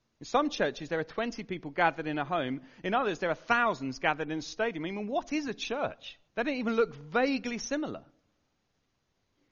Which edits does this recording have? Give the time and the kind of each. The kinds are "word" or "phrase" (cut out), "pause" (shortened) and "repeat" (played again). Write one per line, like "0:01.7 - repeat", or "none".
0:06.3 - pause